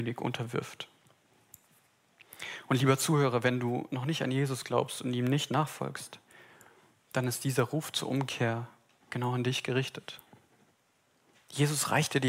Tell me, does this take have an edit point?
no; 0 cuts

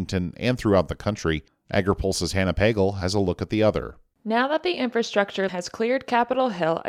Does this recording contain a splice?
yes; 1 cut; at 5.5 s

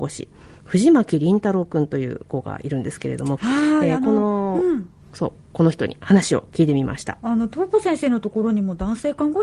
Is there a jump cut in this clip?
yes; 1 cut; at 5.0 s

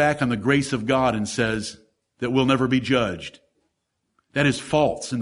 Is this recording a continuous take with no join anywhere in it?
yes; 0 cuts

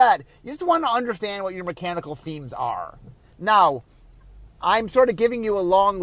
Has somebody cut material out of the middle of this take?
no; 0 cuts

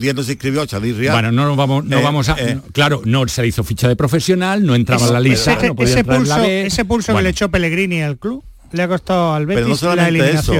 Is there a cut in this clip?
yes; 1 cut; at 5.6 s

